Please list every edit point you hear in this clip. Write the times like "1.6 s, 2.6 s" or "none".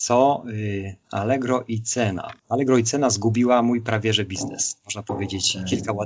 2.4 s